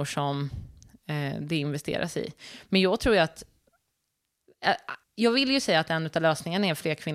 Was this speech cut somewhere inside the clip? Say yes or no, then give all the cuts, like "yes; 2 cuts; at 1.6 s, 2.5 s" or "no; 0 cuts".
yes; 1 cut; at 5.0 s